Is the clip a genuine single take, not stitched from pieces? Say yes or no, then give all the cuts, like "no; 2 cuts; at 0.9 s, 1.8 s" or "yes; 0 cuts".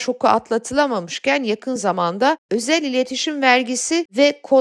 yes; 0 cuts